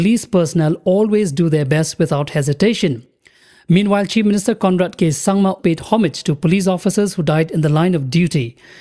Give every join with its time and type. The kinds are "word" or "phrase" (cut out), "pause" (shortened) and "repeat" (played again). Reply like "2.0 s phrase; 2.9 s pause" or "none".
5.6 s word